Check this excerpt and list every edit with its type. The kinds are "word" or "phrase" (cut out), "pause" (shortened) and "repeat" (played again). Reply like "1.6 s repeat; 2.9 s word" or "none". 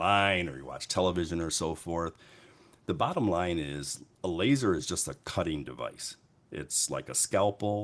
none